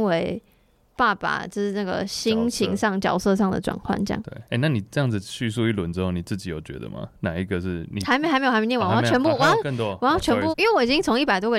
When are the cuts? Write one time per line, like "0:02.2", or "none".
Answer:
0:04.5
0:10.5